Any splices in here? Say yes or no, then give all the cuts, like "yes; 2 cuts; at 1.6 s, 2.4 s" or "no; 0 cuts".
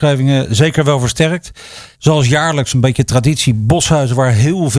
yes; 1 cut; at 1.9 s